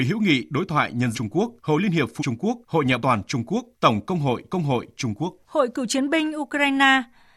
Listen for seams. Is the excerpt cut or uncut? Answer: cut